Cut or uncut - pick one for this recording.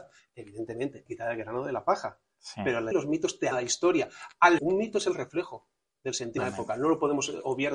cut